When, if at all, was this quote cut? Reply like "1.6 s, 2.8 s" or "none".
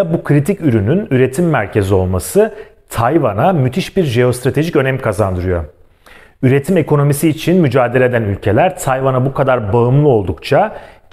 none